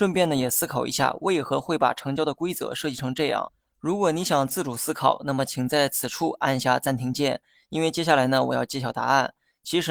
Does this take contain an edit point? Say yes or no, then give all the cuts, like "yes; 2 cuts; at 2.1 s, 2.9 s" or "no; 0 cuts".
no; 0 cuts